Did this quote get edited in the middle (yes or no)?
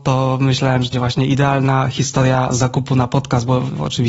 yes